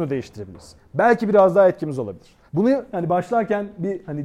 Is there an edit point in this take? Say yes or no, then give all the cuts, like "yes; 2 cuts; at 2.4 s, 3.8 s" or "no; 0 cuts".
yes; 1 cut; at 2.5 s